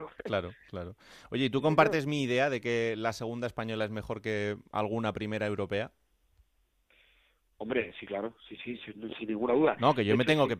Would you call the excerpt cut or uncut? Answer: uncut